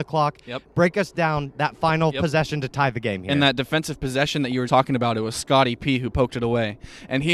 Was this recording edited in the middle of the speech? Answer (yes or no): yes